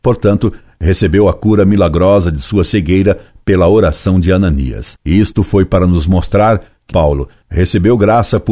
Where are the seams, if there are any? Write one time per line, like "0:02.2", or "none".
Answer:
0:05.0
0:06.9